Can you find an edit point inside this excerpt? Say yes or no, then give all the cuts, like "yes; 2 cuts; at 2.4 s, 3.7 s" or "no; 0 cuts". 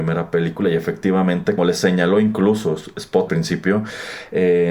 yes; 2 cuts; at 1.6 s, 3.3 s